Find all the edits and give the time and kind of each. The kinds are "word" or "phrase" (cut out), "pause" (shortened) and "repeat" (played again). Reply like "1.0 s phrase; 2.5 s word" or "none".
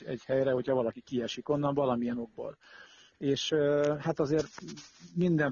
none